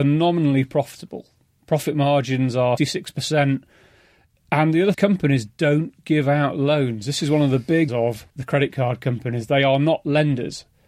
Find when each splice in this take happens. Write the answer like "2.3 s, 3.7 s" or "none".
2.8 s, 4.9 s, 7.9 s, 8.3 s